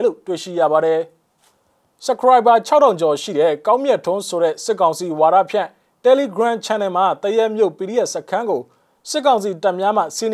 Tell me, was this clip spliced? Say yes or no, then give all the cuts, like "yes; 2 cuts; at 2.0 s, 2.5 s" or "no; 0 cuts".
no; 0 cuts